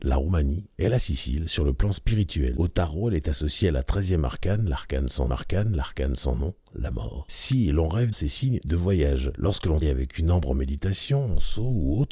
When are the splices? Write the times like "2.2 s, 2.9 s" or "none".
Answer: 5.3 s, 8.1 s, 9.8 s